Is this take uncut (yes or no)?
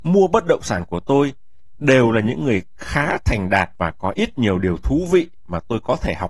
yes